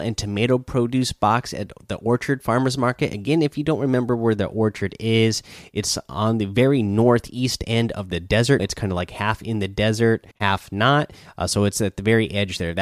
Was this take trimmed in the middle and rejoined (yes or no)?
yes